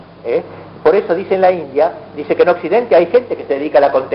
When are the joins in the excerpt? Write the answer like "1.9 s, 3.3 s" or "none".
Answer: none